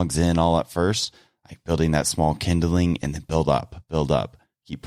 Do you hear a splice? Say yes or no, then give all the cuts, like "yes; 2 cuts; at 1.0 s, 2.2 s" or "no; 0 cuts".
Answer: no; 0 cuts